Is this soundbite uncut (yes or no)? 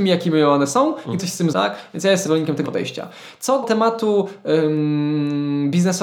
no